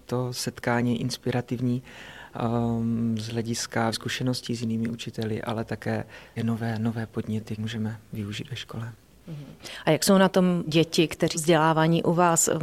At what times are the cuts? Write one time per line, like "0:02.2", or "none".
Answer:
0:03.9
0:06.4
0:07.6
0:10.7
0:11.3

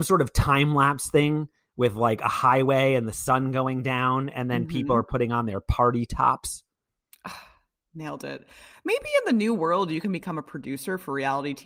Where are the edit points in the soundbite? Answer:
none

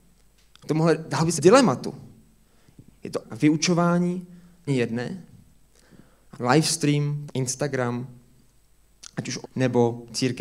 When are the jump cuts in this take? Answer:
0:01.4
0:03.2
0:04.7
0:06.3
0:07.3
0:09.4

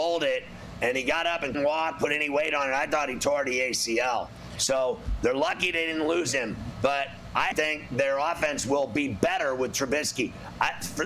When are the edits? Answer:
0:01.5
0:07.5

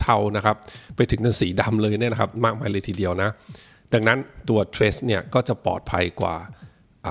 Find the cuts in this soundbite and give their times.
none

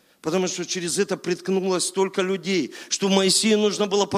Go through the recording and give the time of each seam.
none

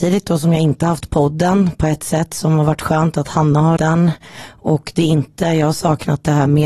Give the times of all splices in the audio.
0:03.8

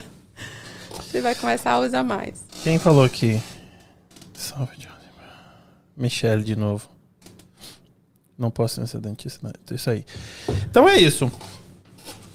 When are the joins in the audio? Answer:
none

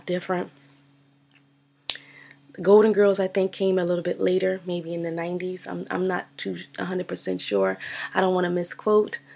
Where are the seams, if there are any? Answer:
none

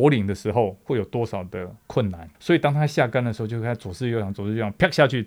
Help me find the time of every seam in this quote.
0:02.3

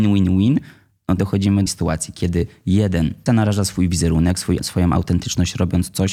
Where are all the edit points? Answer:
0:01.2
0:01.7
0:03.3
0:04.6

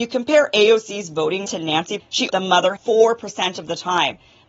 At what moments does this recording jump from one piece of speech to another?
0:01.5
0:02.0
0:02.3
0:02.8

